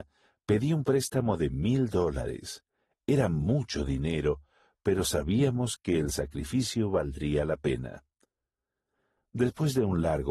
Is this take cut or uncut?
uncut